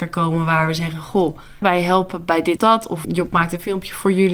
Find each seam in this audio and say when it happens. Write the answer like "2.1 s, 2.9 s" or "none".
1.6 s, 2.6 s, 3.0 s